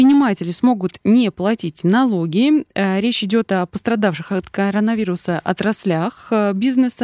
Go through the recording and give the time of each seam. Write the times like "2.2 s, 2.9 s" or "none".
none